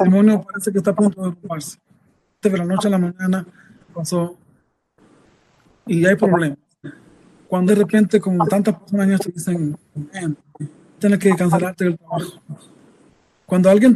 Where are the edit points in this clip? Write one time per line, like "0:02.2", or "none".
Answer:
0:02.4
0:03.9
0:07.7
0:09.2
0:11.0

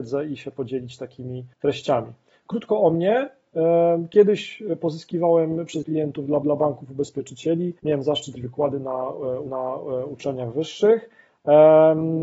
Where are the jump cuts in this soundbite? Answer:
0:01.5
0:05.8
0:06.4
0:07.8
0:08.4
0:09.5

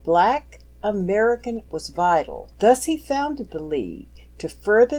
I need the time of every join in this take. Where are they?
0:01.7
0:02.5

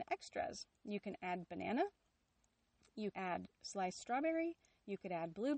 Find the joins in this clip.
0:03.1

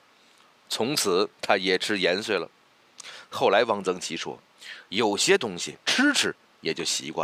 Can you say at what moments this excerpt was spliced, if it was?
0:01.3
0:05.8

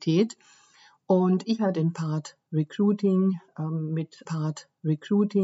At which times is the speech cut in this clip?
0:01.7
0:04.3

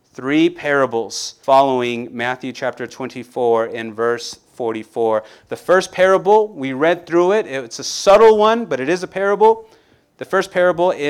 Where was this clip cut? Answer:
0:01.4

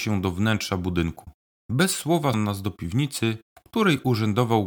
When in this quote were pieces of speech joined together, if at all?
0:01.4
0:02.3
0:03.5

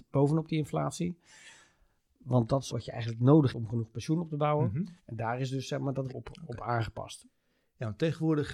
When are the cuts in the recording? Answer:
0:02.7
0:03.5
0:05.0
0:06.1

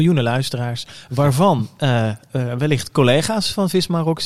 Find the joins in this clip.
none

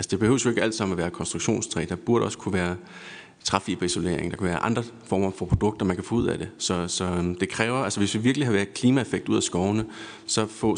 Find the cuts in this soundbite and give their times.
none

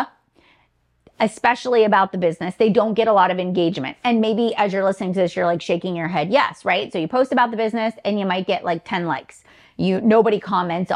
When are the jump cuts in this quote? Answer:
none

